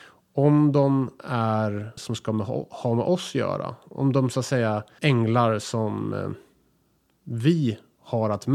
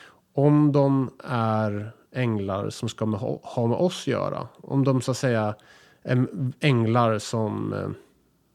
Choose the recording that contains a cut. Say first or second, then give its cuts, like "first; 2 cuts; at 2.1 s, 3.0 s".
first; 2 cuts; at 2.0 s, 5.0 s